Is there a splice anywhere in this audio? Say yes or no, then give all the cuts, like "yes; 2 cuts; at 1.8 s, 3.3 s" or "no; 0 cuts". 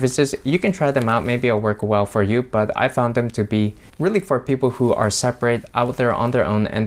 no; 0 cuts